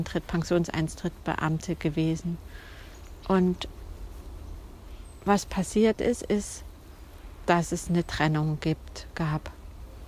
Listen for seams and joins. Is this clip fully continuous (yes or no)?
yes